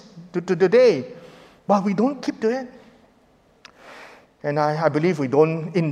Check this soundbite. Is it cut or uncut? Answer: uncut